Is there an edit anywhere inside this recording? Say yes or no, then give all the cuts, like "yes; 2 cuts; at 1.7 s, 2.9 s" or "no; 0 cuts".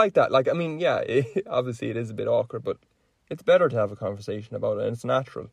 no; 0 cuts